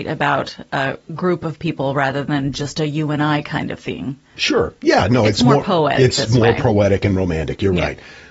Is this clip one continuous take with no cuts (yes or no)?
yes